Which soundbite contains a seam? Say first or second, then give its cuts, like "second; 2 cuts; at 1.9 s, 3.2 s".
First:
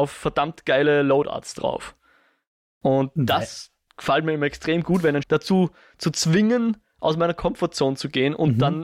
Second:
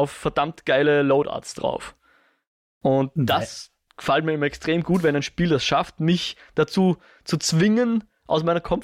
first; 1 cut; at 5.2 s